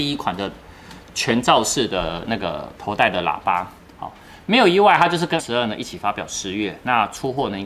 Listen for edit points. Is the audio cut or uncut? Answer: cut